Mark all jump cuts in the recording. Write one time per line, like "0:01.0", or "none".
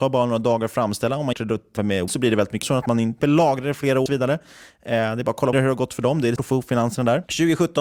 0:01.3
0:01.8
0:02.1
0:02.6
0:03.2
0:04.1
0:05.5
0:06.4